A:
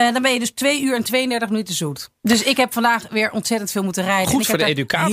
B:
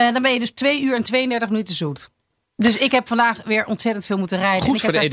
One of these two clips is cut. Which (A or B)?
A